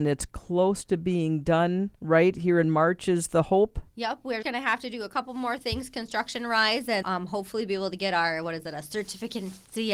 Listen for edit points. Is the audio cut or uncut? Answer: cut